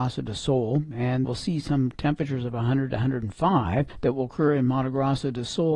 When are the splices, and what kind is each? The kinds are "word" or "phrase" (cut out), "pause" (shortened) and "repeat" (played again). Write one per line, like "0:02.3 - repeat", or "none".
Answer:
0:01.2 - word